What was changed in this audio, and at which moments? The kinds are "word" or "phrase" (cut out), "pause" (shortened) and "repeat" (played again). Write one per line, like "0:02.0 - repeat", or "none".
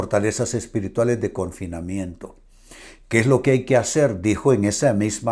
none